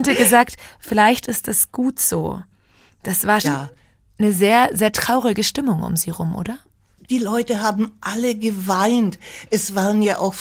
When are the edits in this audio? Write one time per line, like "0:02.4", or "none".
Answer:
0:03.4